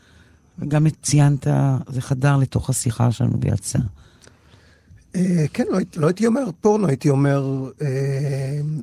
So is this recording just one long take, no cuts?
yes; 0 cuts

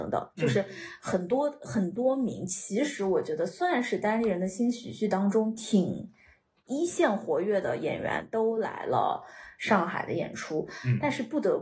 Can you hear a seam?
no; 0 cuts

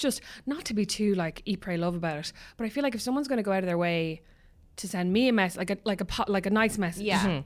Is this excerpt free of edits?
yes; 0 cuts

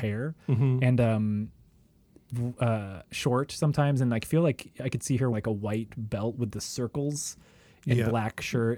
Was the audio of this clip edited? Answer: yes; 1 cut; at 5.3 s

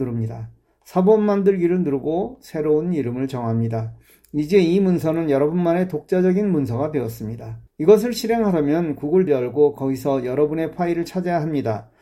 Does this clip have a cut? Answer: yes; 2 cuts; at 7.7 s, 9.3 s

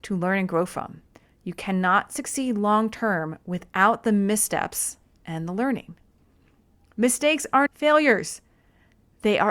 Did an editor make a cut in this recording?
yes; 1 cut; at 7.7 s

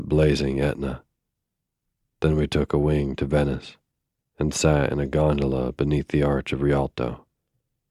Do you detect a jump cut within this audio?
no; 0 cuts

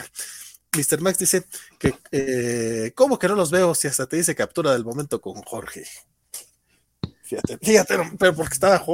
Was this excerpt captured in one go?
yes; 0 cuts

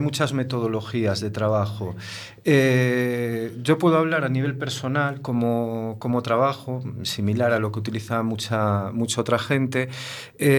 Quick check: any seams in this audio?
no; 0 cuts

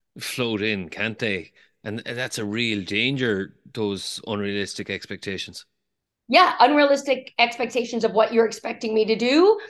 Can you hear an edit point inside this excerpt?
no; 0 cuts

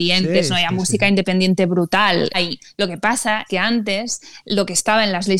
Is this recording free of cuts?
no; 2 cuts; at 2.3 s, 3.5 s

